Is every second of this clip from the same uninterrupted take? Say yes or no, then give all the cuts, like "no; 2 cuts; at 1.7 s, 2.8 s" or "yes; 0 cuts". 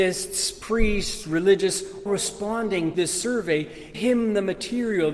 no; 3 cuts; at 2.1 s, 2.9 s, 3.9 s